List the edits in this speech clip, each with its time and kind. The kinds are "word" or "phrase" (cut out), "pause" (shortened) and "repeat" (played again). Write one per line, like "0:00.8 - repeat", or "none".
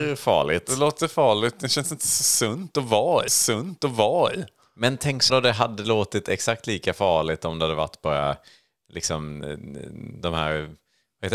0:03.3 - repeat
0:05.3 - word